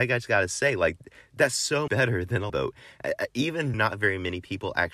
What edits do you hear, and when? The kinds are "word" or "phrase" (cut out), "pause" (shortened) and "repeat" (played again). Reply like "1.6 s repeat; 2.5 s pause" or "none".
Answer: 1.9 s word; 2.5 s word; 3.7 s word